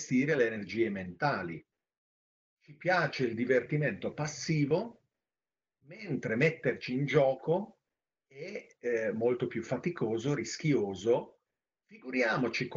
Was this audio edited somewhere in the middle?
no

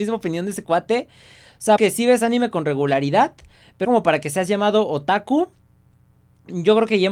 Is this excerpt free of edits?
no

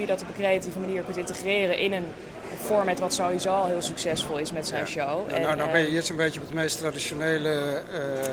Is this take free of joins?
yes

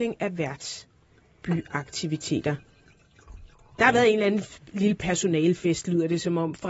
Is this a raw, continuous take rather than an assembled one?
yes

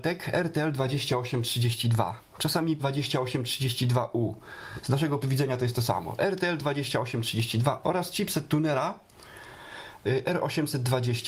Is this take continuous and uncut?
no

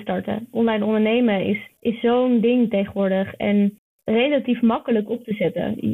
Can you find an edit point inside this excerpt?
no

